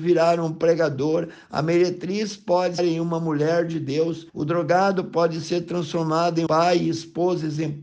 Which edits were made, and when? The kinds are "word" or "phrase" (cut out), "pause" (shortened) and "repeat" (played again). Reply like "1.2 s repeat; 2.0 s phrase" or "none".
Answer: 2.8 s phrase; 4.3 s pause; 6.5 s word